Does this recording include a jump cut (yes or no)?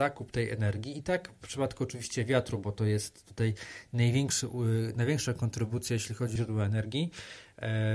yes